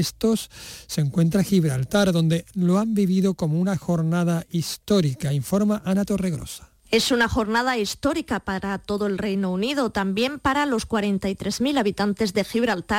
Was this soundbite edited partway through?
no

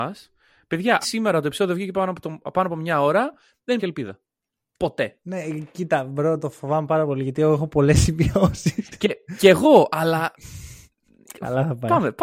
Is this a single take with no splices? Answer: no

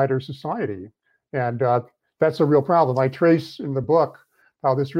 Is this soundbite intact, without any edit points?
yes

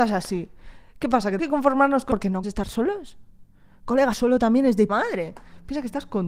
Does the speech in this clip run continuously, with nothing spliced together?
no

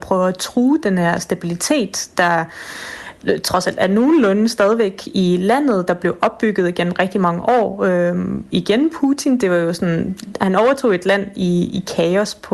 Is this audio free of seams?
yes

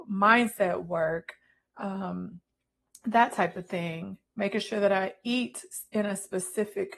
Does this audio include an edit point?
no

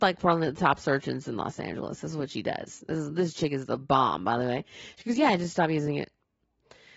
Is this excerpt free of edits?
yes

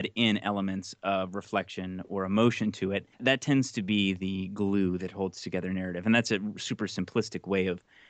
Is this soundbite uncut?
no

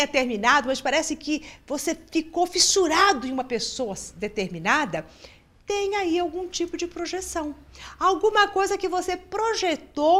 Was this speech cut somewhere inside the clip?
no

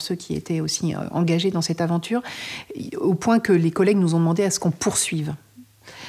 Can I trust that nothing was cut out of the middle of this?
yes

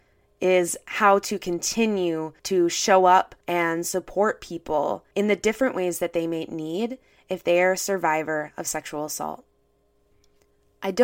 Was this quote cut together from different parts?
yes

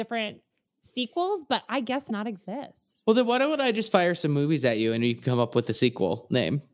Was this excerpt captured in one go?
no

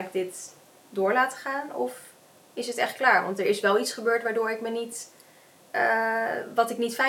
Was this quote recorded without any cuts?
yes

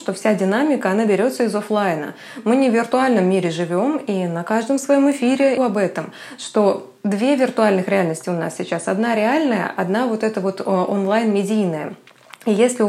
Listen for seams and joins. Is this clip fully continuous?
no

